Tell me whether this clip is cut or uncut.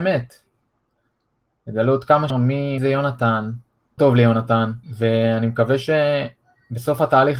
cut